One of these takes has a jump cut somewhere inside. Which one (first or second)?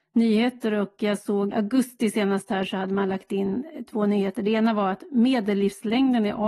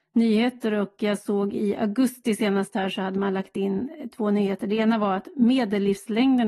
first